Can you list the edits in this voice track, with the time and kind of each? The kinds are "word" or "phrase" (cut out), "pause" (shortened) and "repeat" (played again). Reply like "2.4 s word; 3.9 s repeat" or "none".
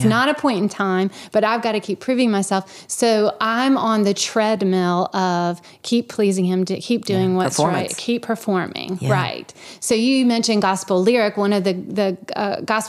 none